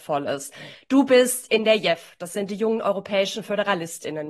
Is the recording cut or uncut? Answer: uncut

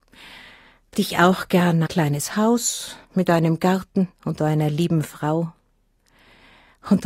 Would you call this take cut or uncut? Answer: cut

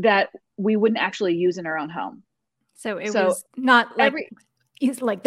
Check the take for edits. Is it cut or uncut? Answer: uncut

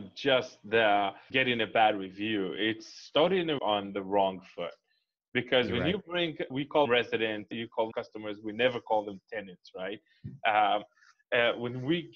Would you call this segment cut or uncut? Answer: cut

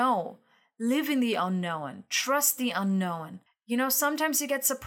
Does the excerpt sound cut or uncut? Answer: cut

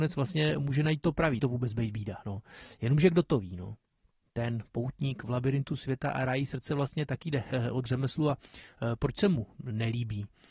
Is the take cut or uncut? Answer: cut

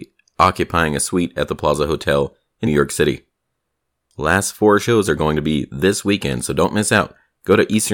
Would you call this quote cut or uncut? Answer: cut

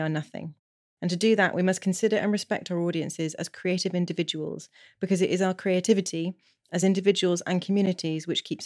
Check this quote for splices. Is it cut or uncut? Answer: uncut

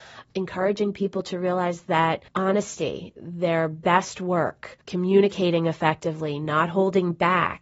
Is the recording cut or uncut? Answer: cut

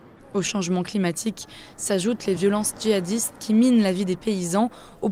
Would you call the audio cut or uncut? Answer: uncut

